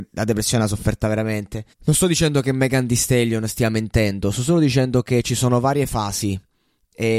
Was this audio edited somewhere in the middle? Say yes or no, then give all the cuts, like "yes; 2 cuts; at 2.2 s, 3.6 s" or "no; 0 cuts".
yes; 1 cut; at 1.7 s